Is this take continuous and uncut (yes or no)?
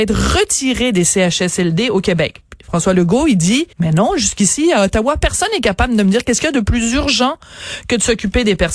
no